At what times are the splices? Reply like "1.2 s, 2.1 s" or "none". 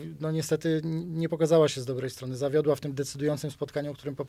none

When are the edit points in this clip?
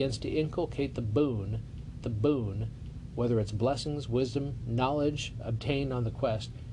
2.0 s

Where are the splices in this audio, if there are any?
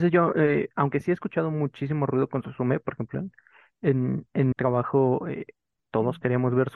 4.5 s

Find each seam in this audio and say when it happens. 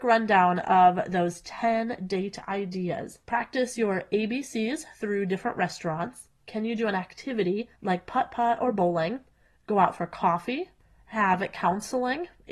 3.2 s, 6.4 s, 7.8 s

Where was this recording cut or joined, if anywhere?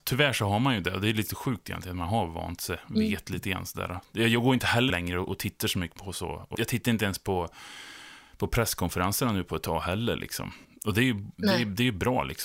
4.9 s, 6.0 s, 6.5 s, 10.6 s

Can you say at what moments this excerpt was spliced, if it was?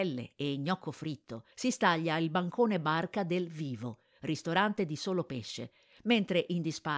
1.5 s

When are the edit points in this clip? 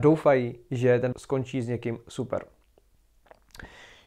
1.1 s

